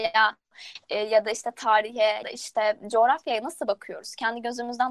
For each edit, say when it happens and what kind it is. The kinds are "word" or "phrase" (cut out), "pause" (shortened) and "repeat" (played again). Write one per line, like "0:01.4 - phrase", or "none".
0:02.2 - word